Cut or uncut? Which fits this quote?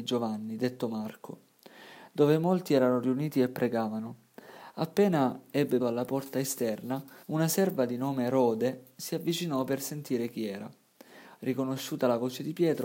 cut